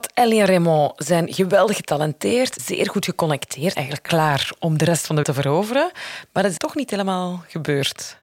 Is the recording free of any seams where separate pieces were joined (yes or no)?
no